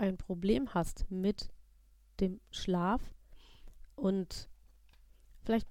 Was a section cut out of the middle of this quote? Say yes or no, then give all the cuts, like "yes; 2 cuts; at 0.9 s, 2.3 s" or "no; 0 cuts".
yes; 1 cut; at 3.9 s